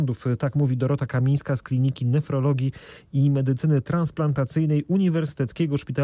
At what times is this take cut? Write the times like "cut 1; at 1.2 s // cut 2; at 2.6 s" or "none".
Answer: none